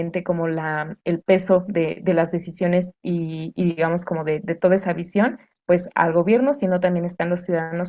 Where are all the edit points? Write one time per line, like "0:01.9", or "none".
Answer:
none